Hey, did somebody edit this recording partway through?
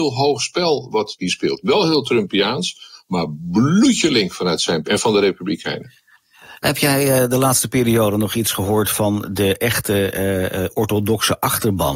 yes; 2 cuts; at 1.2 s, 4.8 s

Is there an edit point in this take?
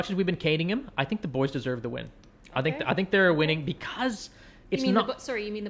no; 0 cuts

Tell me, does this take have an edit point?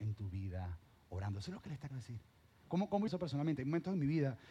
yes; 2 cuts; at 1.9 s, 3.1 s

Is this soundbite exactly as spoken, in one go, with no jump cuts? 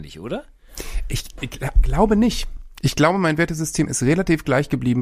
yes; 0 cuts

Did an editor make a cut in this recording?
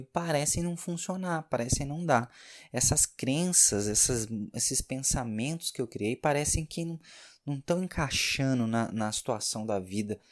no; 0 cuts

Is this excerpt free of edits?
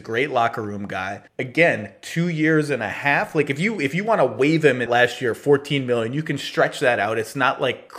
no; 2 cuts; at 1.3 s, 4.9 s

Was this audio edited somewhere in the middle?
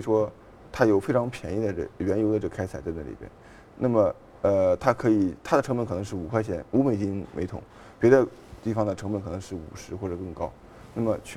no; 0 cuts

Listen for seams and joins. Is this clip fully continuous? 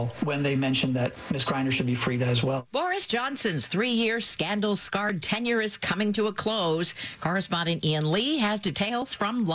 yes; 0 cuts

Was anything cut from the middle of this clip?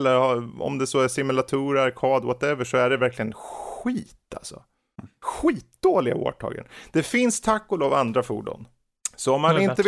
no; 0 cuts

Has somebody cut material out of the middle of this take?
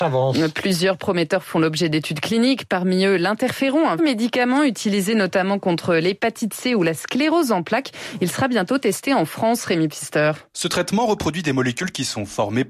yes; 1 cut; at 4.0 s

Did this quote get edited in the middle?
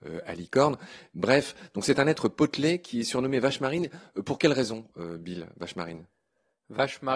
no; 0 cuts

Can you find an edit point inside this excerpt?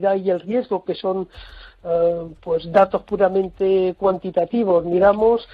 no; 0 cuts

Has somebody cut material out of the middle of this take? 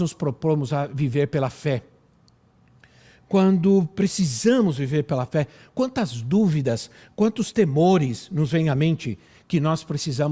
no; 0 cuts

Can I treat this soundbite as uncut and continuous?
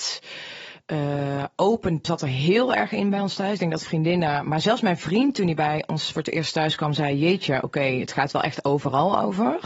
no; 1 cut; at 2.0 s

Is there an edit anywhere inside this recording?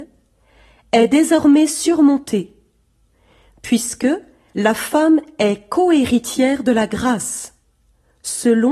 no; 0 cuts

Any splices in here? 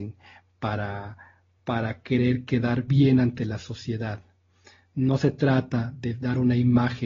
no; 0 cuts

